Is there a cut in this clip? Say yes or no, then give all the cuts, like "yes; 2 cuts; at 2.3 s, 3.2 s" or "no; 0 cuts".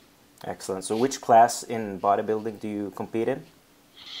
no; 0 cuts